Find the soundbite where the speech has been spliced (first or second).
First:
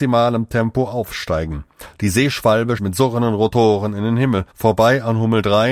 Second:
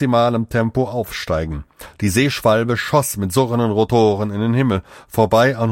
first